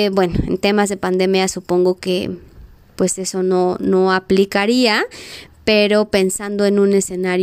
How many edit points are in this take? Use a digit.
0